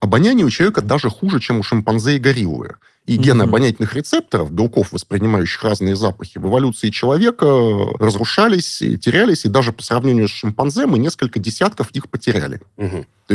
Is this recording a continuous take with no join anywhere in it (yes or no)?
yes